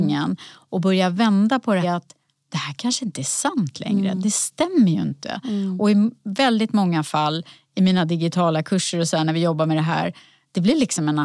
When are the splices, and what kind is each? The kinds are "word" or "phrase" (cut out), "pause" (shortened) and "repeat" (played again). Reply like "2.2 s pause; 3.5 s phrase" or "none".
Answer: 1.8 s phrase